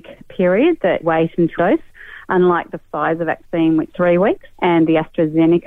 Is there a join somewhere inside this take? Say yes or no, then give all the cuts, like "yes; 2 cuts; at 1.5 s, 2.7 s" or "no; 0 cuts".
yes; 4 cuts; at 1.0 s, 1.6 s, 3.9 s, 4.5 s